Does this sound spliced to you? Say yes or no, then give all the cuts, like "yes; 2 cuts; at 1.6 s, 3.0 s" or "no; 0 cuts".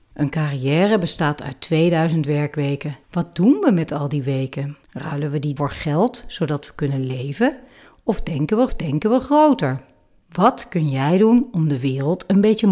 yes; 4 cuts; at 3.0 s, 4.8 s, 5.6 s, 8.7 s